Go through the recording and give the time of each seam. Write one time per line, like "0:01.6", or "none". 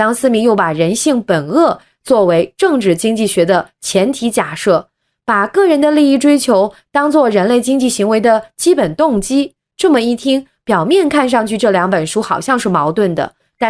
none